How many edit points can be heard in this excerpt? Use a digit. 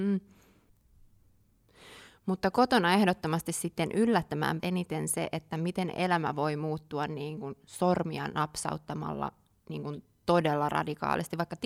1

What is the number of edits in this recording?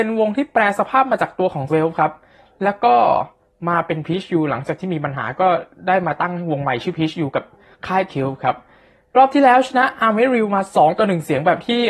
2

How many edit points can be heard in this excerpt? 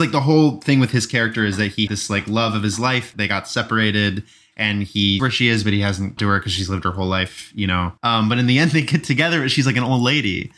5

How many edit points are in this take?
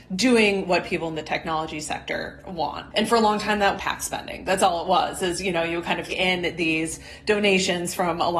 2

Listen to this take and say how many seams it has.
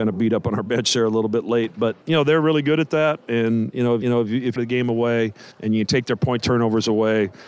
5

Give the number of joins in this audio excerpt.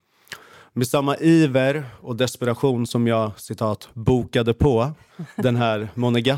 0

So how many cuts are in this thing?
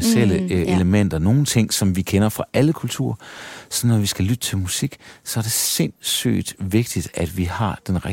0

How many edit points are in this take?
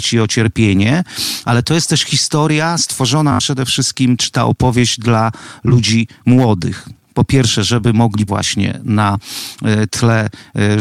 1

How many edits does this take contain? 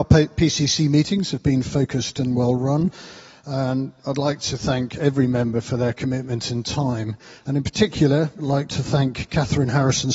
0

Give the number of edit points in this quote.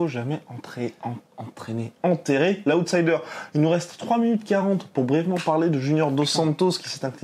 0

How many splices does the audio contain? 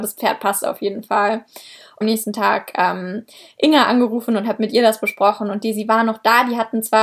1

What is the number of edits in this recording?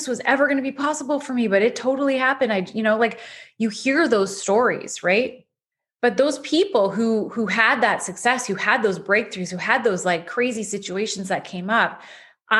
0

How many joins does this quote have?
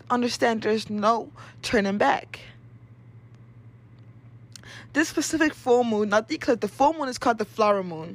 0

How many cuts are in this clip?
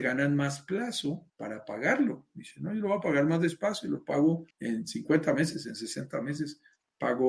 2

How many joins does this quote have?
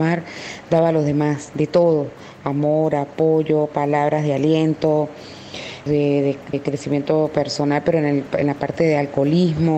2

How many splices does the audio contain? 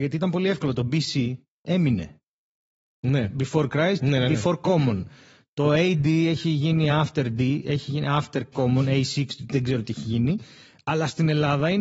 0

